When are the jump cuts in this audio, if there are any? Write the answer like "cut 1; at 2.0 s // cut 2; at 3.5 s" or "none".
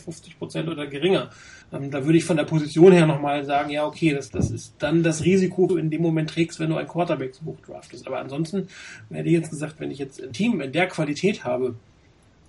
cut 1; at 1.6 s // cut 2; at 4.3 s // cut 3; at 4.8 s // cut 4; at 5.7 s // cut 5; at 10.3 s